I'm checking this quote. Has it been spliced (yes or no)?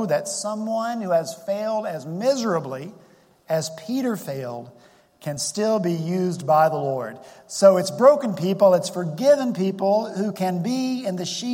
no